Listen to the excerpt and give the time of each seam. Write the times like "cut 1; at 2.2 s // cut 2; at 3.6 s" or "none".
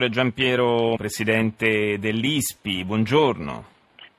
cut 1; at 1.0 s